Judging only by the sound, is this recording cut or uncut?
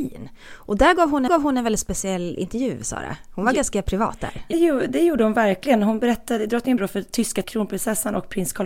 cut